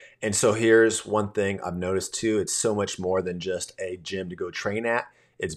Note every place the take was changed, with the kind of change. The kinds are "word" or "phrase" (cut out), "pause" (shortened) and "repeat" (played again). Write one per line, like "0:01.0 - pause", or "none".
none